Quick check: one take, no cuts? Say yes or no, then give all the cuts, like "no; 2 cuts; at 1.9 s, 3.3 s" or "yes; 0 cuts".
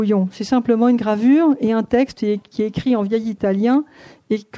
yes; 0 cuts